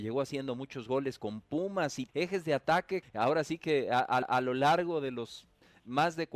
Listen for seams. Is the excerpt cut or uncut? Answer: cut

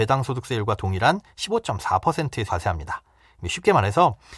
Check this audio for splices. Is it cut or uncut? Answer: cut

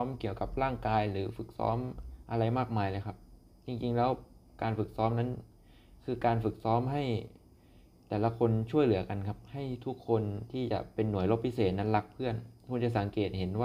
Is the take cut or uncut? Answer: uncut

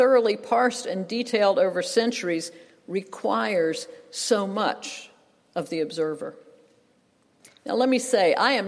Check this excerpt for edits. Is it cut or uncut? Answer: uncut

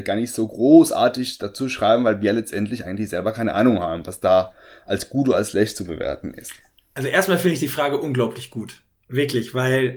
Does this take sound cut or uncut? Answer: uncut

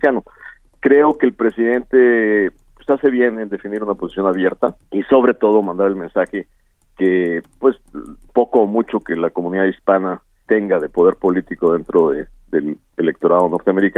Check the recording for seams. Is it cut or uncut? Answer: cut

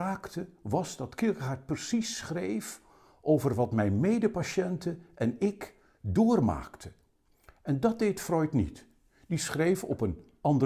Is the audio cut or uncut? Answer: uncut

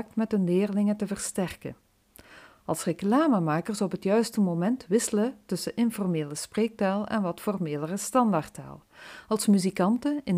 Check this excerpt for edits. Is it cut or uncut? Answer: uncut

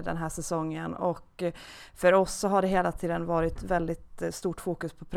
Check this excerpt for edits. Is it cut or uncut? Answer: uncut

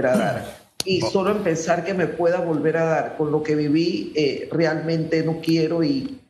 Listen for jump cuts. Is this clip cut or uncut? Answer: uncut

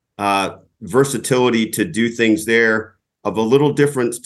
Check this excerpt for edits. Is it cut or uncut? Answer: uncut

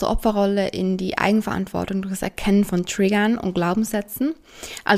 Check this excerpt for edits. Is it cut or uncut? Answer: uncut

